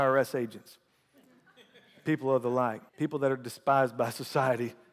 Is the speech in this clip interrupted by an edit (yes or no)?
yes